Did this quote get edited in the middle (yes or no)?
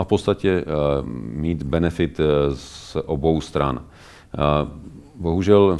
no